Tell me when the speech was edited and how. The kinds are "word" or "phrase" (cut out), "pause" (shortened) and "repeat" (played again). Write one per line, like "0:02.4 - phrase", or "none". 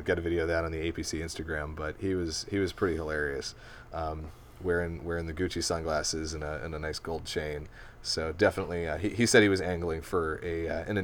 none